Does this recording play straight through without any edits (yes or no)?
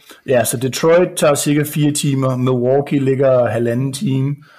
yes